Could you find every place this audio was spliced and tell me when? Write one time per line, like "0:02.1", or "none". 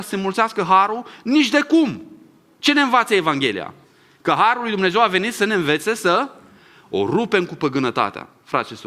none